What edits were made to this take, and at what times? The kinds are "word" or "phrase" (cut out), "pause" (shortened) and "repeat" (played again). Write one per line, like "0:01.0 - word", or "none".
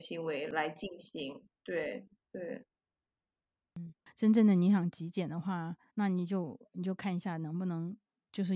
0:05.9 - pause